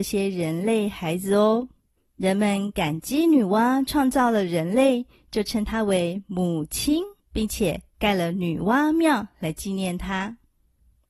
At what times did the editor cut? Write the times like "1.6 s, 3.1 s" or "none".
2.0 s, 7.2 s

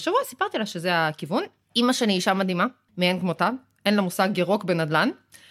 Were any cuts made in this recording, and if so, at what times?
none

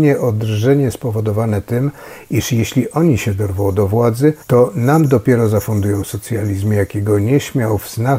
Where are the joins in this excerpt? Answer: 0.9 s, 4.4 s

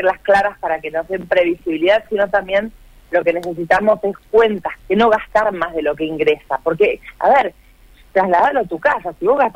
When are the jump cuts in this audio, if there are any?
4.8 s

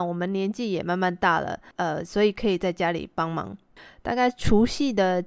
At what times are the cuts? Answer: 1.7 s

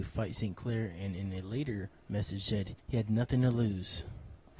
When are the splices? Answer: 2.8 s

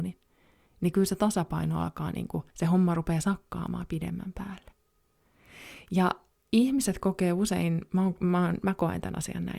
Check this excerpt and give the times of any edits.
2.5 s, 6.3 s

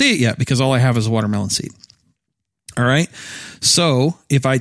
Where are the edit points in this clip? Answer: none

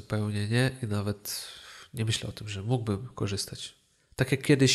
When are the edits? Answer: none

